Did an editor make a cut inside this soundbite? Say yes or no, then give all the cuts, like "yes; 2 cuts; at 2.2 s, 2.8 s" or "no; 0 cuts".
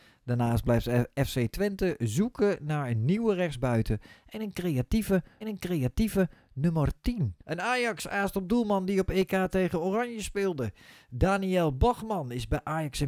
yes; 2 cuts; at 5.4 s, 7.4 s